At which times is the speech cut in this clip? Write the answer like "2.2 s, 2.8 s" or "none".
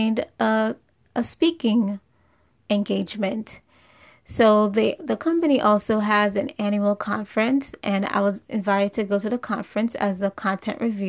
none